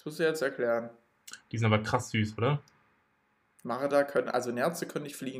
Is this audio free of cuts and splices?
yes; 0 cuts

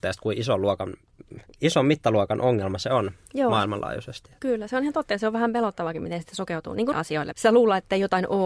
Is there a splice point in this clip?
yes; 3 cuts; at 1.5 s, 6.9 s, 7.3 s

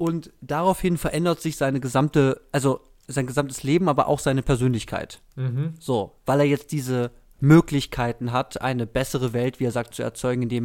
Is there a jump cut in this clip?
no; 0 cuts

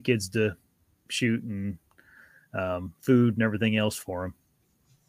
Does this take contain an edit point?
no; 0 cuts

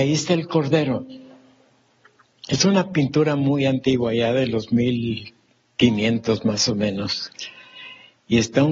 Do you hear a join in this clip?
no; 0 cuts

